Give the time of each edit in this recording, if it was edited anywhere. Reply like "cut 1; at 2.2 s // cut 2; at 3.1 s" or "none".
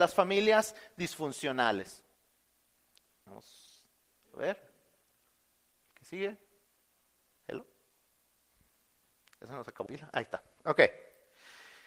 cut 1; at 9.9 s